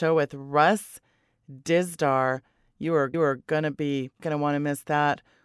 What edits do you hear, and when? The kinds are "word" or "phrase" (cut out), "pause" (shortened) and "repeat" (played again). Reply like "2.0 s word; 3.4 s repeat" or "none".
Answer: 3.1 s repeat; 4.2 s phrase